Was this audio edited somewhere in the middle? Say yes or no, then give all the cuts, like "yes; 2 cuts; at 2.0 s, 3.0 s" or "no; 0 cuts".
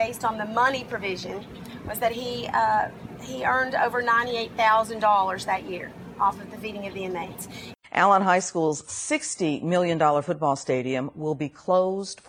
no; 0 cuts